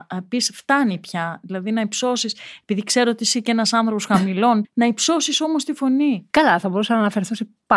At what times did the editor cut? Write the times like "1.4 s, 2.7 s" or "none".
4.6 s, 6.3 s